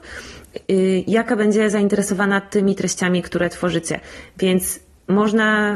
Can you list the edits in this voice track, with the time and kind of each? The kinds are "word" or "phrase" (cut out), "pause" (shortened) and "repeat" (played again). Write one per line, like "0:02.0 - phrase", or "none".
none